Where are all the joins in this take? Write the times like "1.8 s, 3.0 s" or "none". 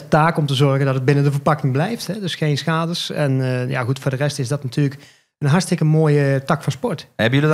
none

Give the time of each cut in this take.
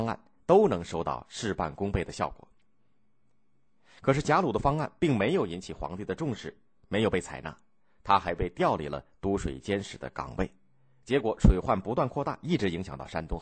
none

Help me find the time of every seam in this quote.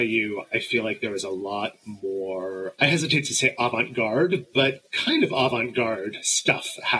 4.9 s

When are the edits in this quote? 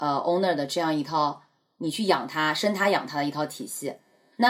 none

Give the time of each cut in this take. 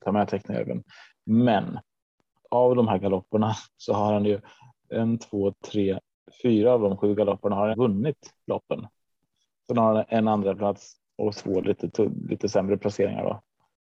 2.4 s, 7.7 s, 11.3 s

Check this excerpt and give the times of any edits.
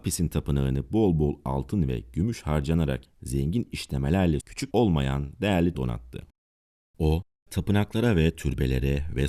3.0 s, 4.4 s, 4.7 s, 5.7 s

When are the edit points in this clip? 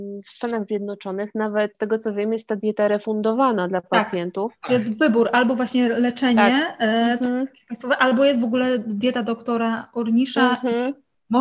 1.7 s

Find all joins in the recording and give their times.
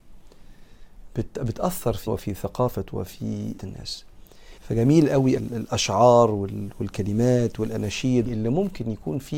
2.1 s, 3.6 s, 4.6 s, 5.4 s, 8.3 s

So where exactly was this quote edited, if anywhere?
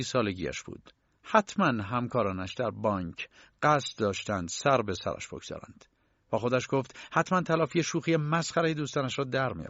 none

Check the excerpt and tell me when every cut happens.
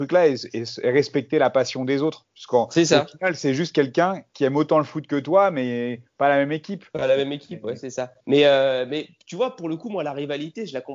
8.2 s

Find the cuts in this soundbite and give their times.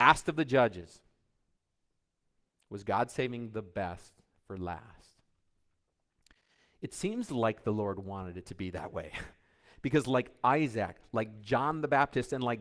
none

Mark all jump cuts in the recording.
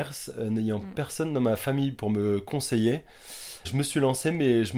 3.6 s

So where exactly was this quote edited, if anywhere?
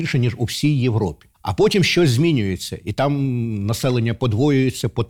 1.3 s

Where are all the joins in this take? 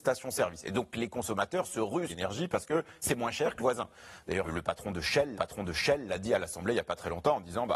2.1 s, 3.6 s, 4.4 s, 5.3 s

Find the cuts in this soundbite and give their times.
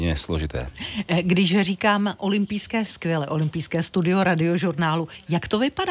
2.9 s

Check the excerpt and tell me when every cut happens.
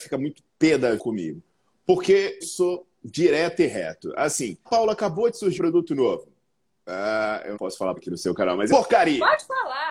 1.0 s, 2.4 s, 4.7 s, 5.6 s, 7.5 s, 8.0 s, 8.7 s

